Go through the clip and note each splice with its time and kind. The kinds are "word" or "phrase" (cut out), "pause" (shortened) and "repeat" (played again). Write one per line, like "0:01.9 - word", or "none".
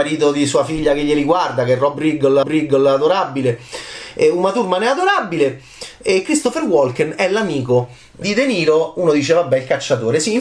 0:02.4 - repeat
0:08.2 - word